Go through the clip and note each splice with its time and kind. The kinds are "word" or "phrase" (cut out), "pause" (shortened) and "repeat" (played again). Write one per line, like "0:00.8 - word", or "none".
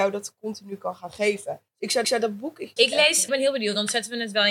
0:01.7 - pause
0:02.0 - repeat
0:02.8 - word
0:03.3 - phrase